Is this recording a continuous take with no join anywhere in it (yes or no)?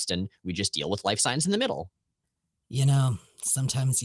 yes